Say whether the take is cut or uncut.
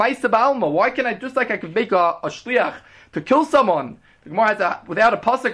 uncut